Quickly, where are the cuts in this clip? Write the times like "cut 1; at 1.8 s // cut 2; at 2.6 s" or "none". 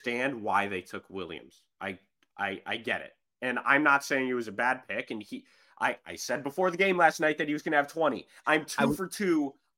none